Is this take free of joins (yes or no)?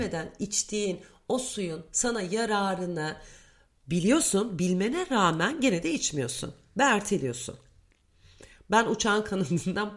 yes